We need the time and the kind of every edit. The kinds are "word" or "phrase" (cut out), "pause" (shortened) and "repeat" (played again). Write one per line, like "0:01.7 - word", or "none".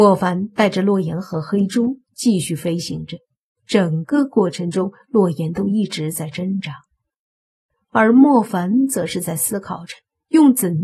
none